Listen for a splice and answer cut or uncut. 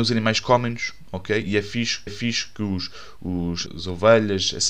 cut